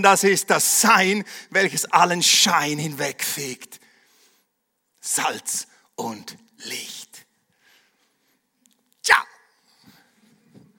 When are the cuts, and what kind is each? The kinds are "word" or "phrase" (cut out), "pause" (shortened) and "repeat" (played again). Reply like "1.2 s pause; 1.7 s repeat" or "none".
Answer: none